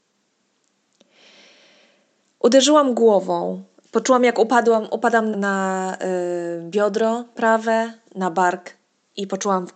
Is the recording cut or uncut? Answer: cut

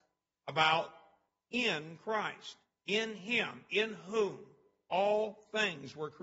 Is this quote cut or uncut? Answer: uncut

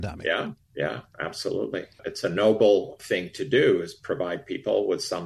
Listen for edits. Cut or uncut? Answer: uncut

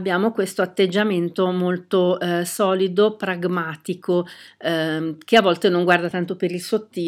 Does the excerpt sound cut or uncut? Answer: uncut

